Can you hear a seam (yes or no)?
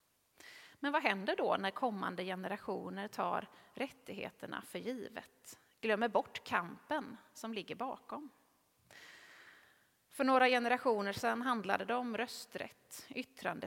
no